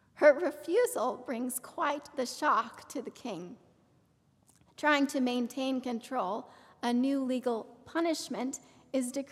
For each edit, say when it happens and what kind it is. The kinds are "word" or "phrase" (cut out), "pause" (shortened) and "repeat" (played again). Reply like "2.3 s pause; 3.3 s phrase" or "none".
none